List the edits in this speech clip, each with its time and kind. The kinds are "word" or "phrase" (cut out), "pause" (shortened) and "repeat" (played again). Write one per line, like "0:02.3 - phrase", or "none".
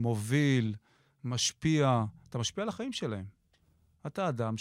none